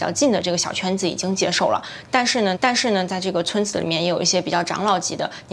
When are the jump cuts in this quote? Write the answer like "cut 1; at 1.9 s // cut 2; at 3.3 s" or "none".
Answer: cut 1; at 2.6 s